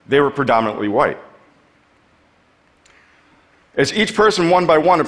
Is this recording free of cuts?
yes; 0 cuts

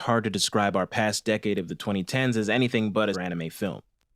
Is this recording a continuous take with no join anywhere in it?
no; 1 cut; at 3.1 s

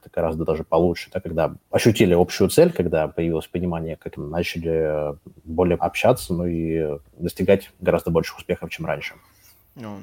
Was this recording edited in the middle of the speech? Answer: yes; 3 cuts; at 1.6 s, 4.2 s, 5.8 s

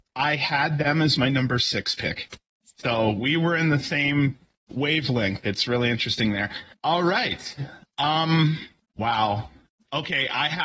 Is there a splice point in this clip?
no; 0 cuts

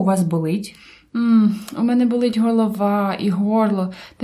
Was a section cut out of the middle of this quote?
no; 0 cuts

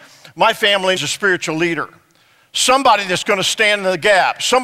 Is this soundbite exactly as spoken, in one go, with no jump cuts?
no; 1 cut; at 1.0 s

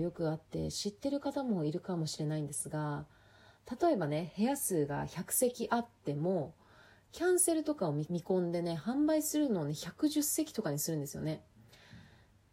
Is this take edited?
no; 0 cuts

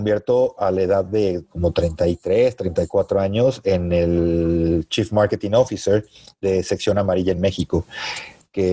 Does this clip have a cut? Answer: no; 0 cuts

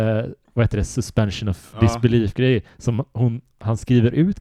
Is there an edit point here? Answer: no; 0 cuts

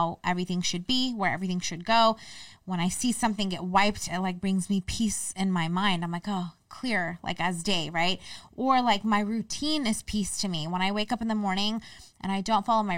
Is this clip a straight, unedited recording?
yes; 0 cuts

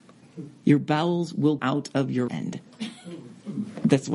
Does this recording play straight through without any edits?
no; 2 cuts; at 1.6 s, 2.3 s

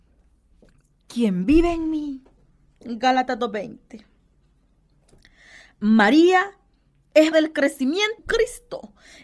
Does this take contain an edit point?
yes; 2 cuts; at 7.3 s, 8.2 s

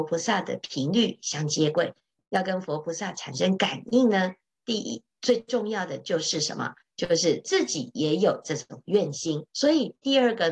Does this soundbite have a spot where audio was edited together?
yes; 1 cut; at 9.5 s

